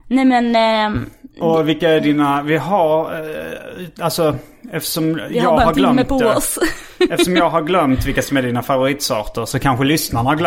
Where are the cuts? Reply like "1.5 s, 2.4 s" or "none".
none